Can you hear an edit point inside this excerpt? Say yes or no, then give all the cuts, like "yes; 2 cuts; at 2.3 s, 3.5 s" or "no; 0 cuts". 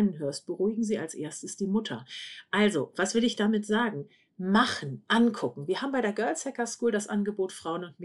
no; 0 cuts